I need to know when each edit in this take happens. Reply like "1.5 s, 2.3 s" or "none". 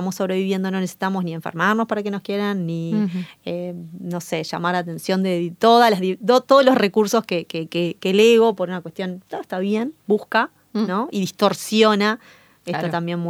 none